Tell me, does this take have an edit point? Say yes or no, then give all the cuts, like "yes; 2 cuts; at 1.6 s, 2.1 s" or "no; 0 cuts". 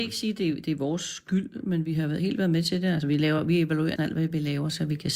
yes; 1 cut; at 4.0 s